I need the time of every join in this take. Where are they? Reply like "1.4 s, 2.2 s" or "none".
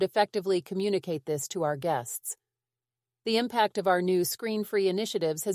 none